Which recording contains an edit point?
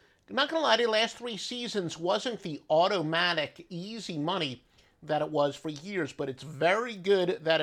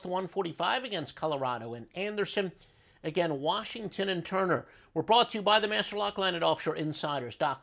first; 1 cut; at 2.4 s

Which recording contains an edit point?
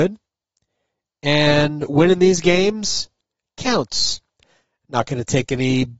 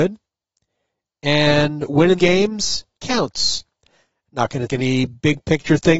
second; 3 cuts; at 2.2 s, 2.9 s, 4.7 s

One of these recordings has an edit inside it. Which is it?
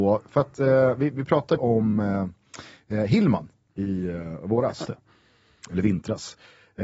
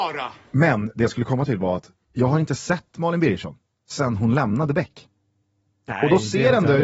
first; 3 cuts; at 1.6 s, 3.7 s, 4.8 s

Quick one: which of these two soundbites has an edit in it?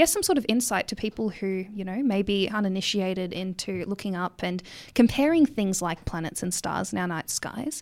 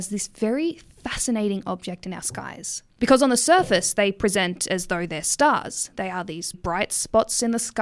second; 2 cuts; at 2.9 s, 6.5 s

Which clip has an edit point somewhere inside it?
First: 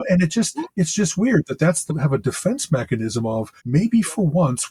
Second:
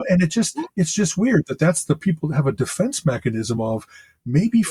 first; 2 cuts; at 1.9 s, 3.6 s

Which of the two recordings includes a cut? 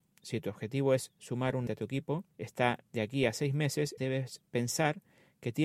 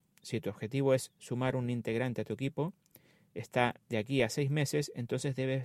first; 3 cuts; at 1.7 s, 2.3 s, 4.0 s

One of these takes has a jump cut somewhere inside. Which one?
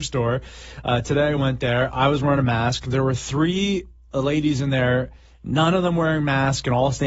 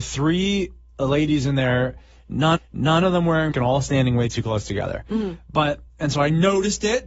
second; 2 cuts; at 2.6 s, 3.5 s

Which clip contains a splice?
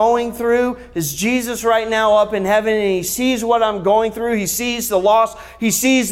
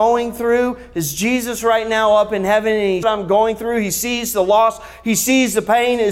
second; 1 cut; at 3.0 s

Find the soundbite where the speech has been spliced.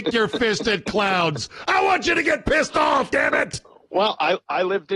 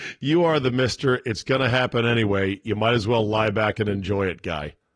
first; 1 cut; at 3.1 s

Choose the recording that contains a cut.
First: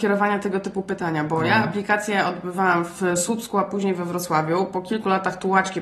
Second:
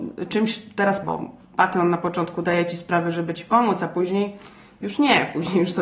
second; 1 cut; at 1.0 s

